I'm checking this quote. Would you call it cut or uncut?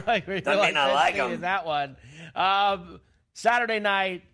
uncut